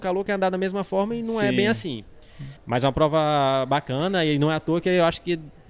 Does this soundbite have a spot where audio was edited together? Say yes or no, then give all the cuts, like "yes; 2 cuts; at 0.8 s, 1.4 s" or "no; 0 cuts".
yes; 1 cut; at 2.6 s